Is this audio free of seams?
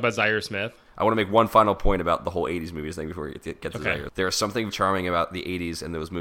no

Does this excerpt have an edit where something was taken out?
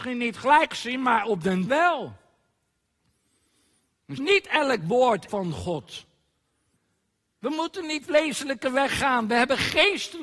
yes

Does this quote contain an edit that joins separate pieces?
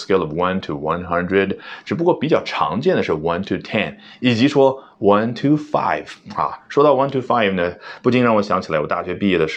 no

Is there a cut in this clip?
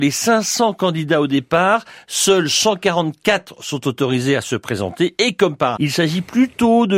yes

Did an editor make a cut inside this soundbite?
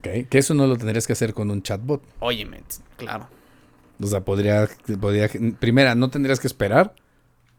no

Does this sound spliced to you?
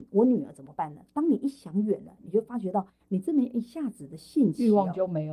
yes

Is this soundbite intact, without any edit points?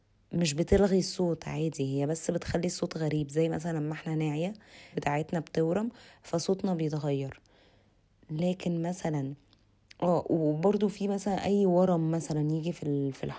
no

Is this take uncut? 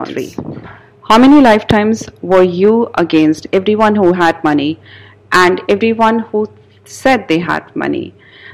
yes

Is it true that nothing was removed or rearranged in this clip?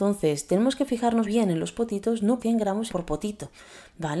no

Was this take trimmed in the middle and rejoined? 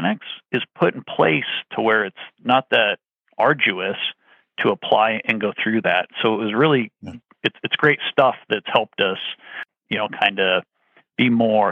no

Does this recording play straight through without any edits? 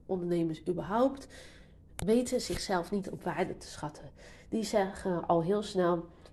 yes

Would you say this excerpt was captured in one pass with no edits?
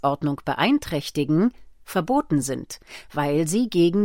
yes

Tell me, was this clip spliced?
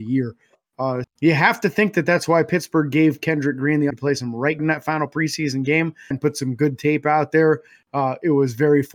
yes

